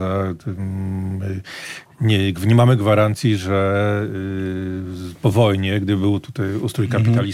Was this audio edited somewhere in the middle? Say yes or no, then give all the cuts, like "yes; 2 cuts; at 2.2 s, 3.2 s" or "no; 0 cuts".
no; 0 cuts